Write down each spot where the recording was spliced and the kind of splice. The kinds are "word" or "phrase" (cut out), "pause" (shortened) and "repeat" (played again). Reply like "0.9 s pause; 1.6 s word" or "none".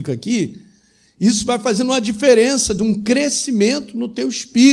none